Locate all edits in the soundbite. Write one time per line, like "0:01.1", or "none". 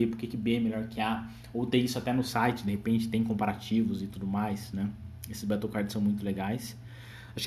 none